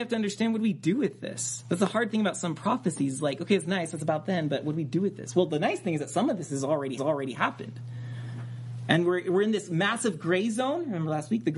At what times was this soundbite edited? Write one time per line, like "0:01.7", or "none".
0:07.0